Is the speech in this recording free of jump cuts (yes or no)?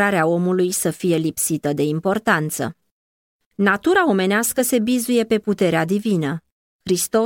yes